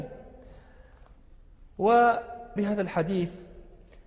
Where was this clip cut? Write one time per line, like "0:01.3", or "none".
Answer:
0:02.6

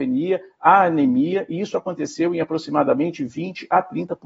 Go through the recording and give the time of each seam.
none

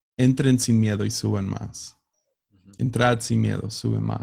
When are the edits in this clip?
none

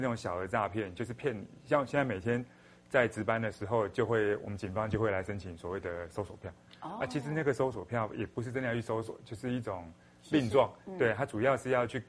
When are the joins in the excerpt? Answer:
none

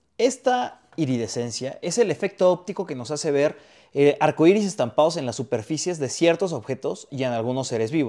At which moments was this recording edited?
none

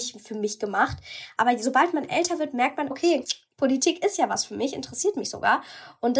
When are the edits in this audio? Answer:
0:02.9

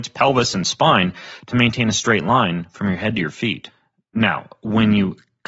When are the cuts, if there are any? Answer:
none

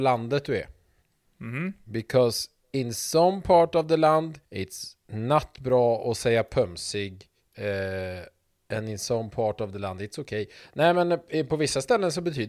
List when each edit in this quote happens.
0:01.0
0:04.4
0:07.4

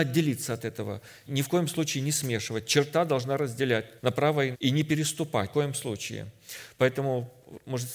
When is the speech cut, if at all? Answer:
0:01.3
0:04.0
0:04.5
0:05.5

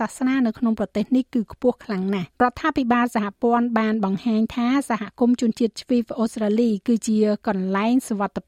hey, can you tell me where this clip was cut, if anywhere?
0:02.3

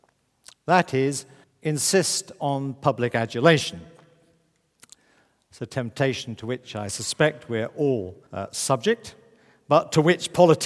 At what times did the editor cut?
0:01.4
0:08.3

